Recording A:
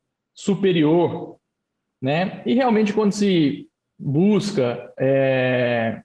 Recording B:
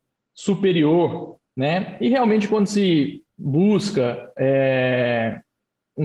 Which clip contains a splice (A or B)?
B